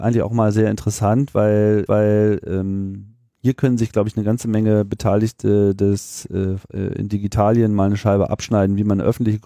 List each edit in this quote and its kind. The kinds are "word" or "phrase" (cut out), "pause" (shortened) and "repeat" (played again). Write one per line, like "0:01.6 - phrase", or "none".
0:01.9 - repeat